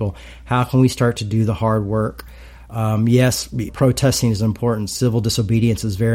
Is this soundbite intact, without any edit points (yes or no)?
no